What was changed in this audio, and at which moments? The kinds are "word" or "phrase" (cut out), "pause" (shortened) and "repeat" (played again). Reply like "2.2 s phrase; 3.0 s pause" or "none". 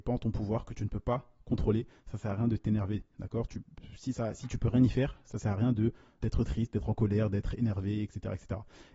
6.2 s word